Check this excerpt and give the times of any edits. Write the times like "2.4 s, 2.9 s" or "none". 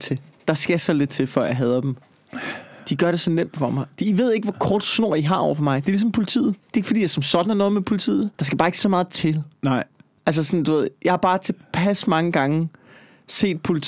6.6 s, 8.3 s, 9.5 s